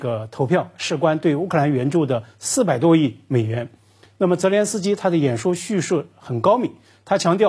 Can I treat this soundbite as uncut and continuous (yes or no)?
yes